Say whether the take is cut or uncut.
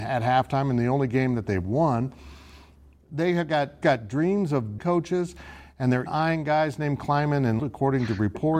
cut